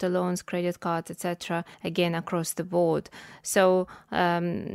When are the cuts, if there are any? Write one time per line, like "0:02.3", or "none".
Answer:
0:01.7